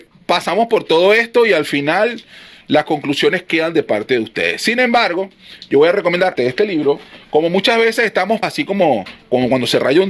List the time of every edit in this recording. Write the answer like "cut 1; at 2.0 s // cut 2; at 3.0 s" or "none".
cut 1; at 6.4 s // cut 2; at 8.4 s